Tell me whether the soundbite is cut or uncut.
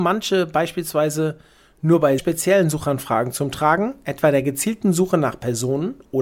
cut